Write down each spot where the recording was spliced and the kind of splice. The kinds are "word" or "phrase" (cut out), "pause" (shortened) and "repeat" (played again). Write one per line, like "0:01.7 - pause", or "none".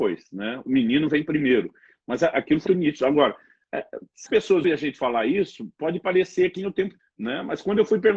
0:02.7 - word
0:04.3 - word
0:04.6 - word
0:06.6 - word
0:07.0 - word